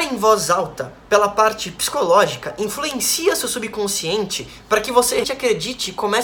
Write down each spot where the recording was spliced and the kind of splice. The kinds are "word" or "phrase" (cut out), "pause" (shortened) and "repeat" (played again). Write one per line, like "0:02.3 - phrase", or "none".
0:05.2 - word